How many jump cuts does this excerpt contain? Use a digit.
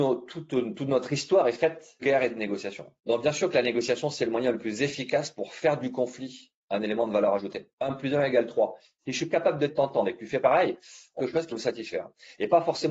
7